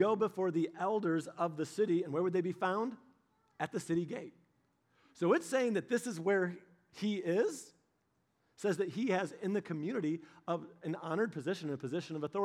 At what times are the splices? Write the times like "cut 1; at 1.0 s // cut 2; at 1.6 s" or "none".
none